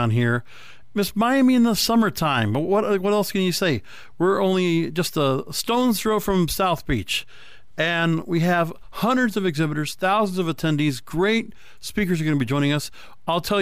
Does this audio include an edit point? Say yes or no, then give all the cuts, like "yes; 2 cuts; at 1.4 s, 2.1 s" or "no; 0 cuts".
no; 0 cuts